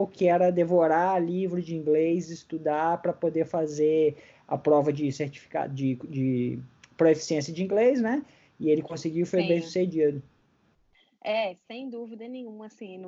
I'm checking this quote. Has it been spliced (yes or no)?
no